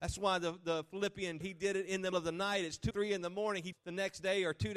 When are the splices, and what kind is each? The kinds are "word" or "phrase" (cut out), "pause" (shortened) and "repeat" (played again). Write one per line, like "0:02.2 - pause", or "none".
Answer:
0:01.4 - word
0:02.1 - word
0:02.9 - word
0:03.7 - phrase